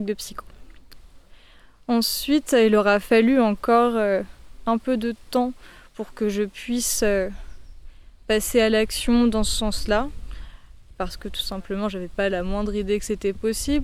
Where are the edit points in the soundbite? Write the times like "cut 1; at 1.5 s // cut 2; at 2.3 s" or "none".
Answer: none